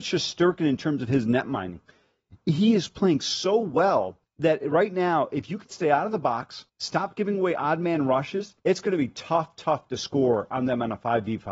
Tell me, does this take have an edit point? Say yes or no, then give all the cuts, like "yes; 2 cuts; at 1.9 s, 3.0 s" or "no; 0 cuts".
yes; 3 cuts; at 4.2 s, 6.7 s, 8.6 s